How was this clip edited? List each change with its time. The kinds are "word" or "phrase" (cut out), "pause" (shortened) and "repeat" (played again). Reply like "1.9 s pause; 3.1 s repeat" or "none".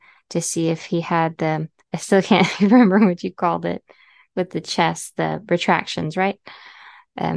none

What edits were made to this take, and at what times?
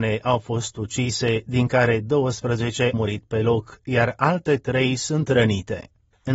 2.9 s word

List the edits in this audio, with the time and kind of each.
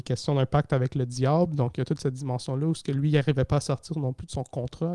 none

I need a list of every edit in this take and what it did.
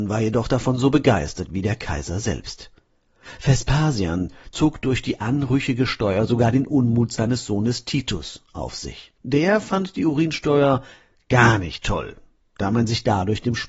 none

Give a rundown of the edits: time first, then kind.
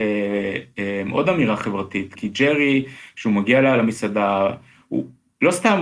2.2 s word

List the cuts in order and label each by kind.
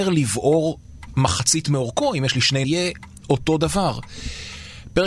2.6 s phrase

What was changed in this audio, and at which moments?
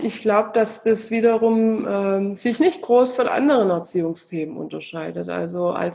none

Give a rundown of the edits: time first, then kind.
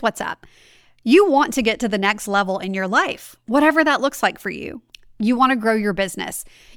none

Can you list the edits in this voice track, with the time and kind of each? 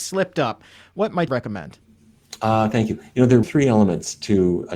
1.3 s word; 3.4 s word

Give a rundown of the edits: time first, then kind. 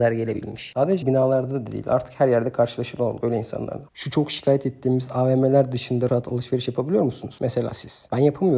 1.0 s word; 3.9 s pause; 6.1 s word

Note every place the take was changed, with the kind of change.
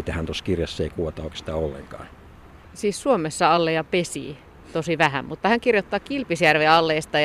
none

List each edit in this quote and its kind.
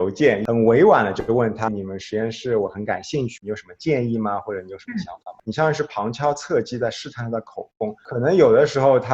1.7 s word; 3.4 s phrase

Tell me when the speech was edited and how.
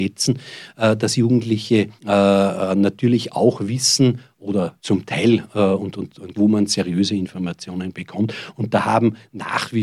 2.0 s pause; 4.8 s pause; 6.3 s phrase

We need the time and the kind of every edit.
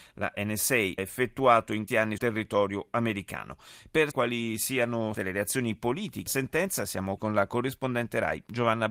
1.0 s word; 1.9 s word; 2.2 s word; 4.1 s word; 5.1 s word; 6.3 s word; 7.2 s word

